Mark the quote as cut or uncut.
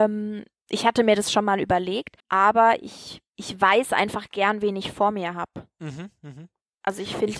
cut